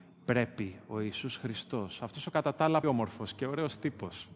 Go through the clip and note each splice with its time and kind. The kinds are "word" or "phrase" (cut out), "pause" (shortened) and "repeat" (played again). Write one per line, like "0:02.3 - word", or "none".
0:02.8 - word

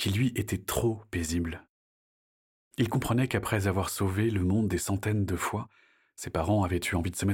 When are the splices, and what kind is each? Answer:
none

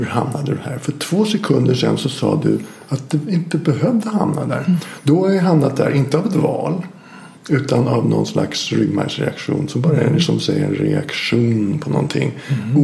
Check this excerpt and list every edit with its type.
0:07.4 - pause

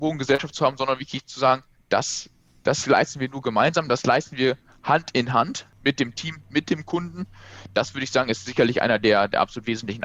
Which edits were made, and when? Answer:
none

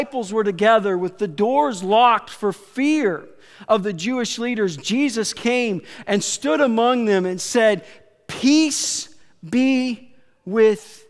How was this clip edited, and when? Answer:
none

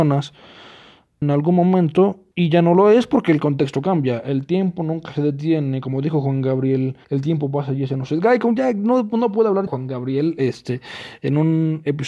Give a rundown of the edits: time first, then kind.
0:01.2 - word
0:02.3 - pause
0:07.0 - pause
0:09.7 - word

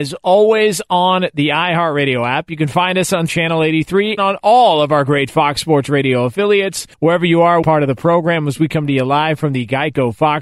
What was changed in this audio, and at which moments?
0:03.3 - word
0:04.2 - word
0:06.9 - pause
0:07.6 - phrase

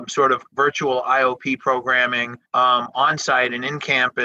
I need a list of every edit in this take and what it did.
0:02.5 - pause

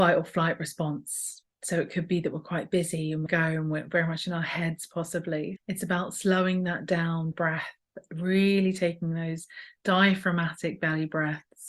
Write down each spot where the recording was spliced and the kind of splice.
0:03.3 - phrase
0:05.6 - word
0:07.3 - phrase

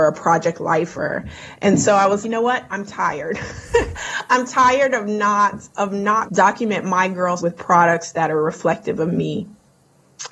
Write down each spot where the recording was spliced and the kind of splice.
0:02.2 - word
0:06.3 - phrase
0:07.4 - word

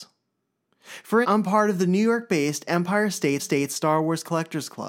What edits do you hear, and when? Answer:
0:01.2 - word
0:03.4 - repeat

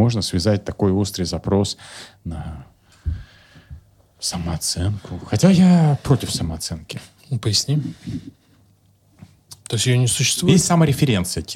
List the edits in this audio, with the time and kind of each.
none

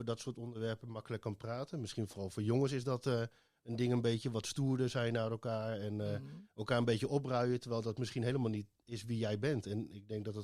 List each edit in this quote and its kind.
none

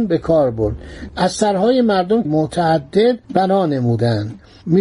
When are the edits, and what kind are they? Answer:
0:02.2 - word
0:03.2 - pause

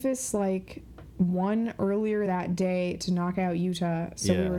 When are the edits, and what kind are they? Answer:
none

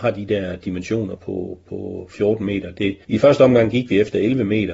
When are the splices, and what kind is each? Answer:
0:01.2 - word
0:03.0 - pause

